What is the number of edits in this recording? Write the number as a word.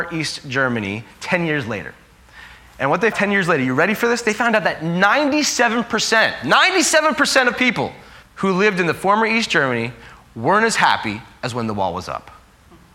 two